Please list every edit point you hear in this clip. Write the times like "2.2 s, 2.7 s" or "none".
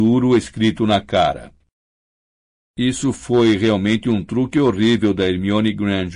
none